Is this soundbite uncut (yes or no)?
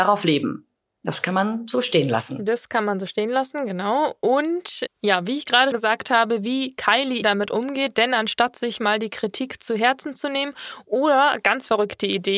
no